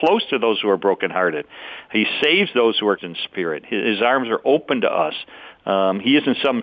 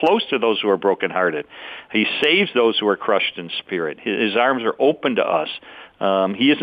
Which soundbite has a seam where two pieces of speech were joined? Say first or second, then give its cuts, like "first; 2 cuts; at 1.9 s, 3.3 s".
first; 1 cut; at 3.0 s